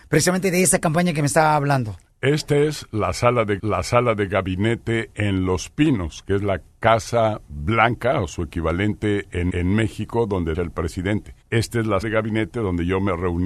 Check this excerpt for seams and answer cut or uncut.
cut